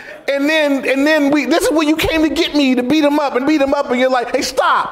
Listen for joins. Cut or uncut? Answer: cut